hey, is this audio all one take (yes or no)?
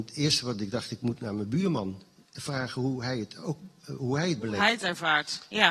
yes